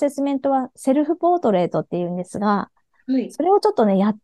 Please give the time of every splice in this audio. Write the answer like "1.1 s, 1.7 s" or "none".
none